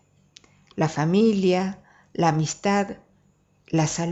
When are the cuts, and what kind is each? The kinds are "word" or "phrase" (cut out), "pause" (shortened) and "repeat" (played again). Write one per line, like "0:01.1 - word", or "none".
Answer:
none